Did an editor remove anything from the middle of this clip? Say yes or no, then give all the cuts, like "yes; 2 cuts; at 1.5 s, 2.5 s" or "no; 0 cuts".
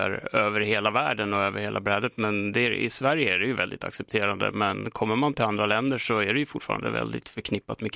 no; 0 cuts